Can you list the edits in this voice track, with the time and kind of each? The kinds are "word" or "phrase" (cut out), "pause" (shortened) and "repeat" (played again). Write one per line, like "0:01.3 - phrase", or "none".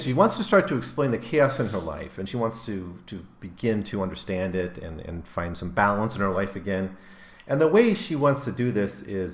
none